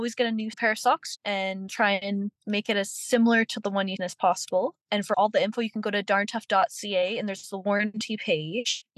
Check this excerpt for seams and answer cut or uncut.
cut